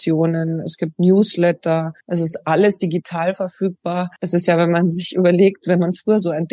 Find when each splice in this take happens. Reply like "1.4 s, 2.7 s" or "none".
2.0 s, 4.2 s